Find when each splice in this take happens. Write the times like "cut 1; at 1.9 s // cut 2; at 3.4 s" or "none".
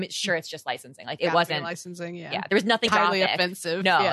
cut 1; at 1.2 s // cut 2; at 2.9 s